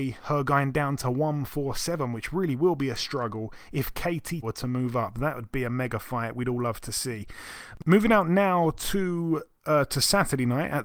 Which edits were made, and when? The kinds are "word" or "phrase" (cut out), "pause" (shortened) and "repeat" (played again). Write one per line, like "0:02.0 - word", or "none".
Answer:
0:04.4 - word